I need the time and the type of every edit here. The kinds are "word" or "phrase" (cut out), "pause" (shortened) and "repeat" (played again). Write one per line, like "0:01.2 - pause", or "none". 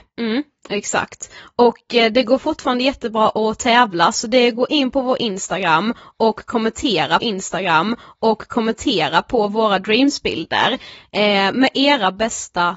0:07.2 - repeat